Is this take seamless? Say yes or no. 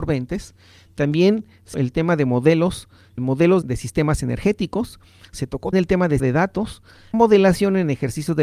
no